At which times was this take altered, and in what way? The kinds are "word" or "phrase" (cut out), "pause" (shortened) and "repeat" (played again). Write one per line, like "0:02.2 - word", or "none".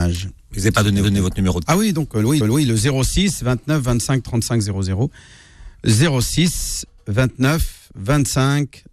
0:01.0 - repeat
0:01.7 - word
0:02.4 - repeat